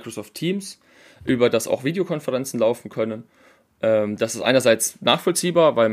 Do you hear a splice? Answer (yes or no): no